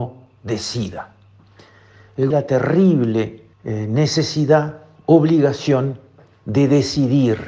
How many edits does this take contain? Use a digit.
2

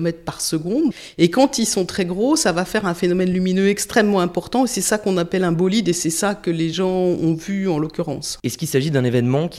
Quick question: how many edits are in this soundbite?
0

